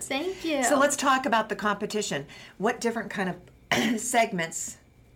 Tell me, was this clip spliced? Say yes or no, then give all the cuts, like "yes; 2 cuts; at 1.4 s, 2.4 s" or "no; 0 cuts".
no; 0 cuts